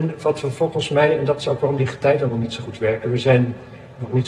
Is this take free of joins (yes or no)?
yes